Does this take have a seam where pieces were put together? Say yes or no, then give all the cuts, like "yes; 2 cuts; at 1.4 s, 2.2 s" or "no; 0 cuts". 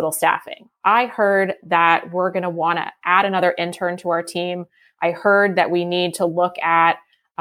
no; 0 cuts